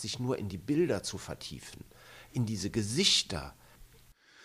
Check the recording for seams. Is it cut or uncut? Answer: uncut